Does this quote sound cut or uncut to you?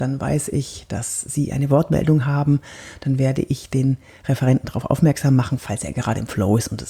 uncut